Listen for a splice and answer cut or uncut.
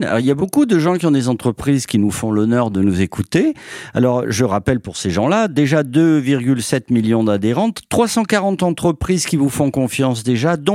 uncut